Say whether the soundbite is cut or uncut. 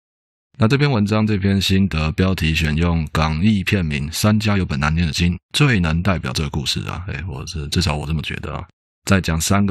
cut